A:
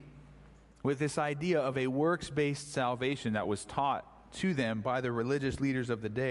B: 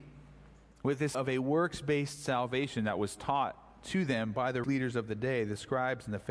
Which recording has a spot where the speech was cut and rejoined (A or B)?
B